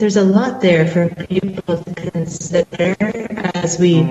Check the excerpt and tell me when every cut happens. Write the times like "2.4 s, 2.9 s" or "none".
1.8 s